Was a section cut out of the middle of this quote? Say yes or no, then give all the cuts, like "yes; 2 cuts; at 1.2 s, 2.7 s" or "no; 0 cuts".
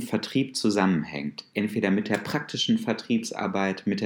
no; 0 cuts